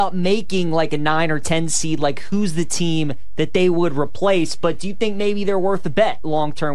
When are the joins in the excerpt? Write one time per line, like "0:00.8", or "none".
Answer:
none